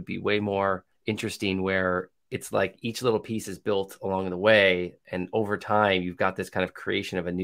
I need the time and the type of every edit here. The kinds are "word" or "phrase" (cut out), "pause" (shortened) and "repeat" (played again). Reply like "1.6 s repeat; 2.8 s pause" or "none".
0.9 s pause